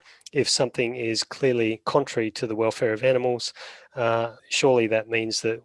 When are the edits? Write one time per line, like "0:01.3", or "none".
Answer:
0:04.4